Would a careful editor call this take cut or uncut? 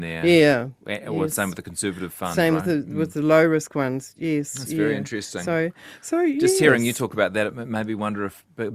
uncut